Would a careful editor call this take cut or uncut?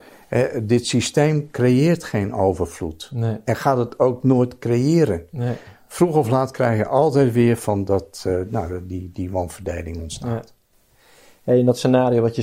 uncut